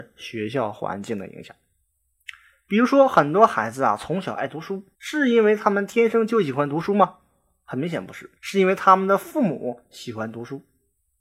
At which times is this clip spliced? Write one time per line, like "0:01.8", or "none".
0:04.9
0:08.4